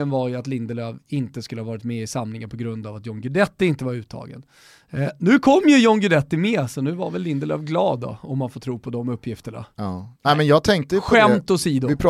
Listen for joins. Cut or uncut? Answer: uncut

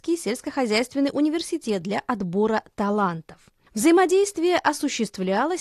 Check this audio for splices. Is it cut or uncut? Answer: uncut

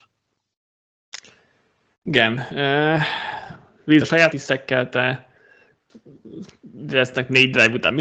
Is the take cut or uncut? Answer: cut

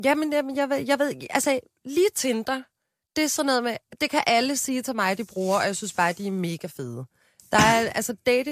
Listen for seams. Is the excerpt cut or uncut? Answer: uncut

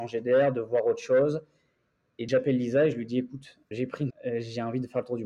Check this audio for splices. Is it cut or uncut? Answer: cut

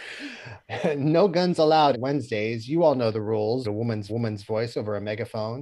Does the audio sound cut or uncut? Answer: cut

